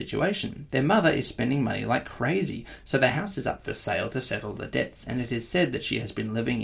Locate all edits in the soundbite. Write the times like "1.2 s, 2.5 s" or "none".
none